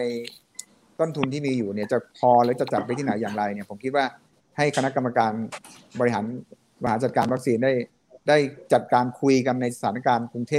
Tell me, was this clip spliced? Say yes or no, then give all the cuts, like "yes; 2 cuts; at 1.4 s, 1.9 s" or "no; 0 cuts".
yes; 1 cut; at 2.1 s